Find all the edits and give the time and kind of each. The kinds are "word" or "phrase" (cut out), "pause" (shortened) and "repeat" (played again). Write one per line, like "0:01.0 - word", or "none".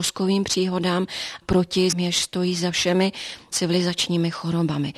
0:01.4 - word
0:01.9 - word